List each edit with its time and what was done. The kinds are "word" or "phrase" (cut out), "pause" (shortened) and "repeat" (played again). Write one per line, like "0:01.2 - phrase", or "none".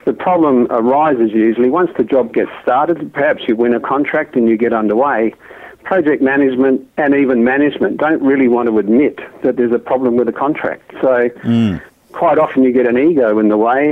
none